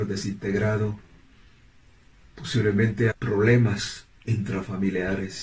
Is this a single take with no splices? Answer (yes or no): no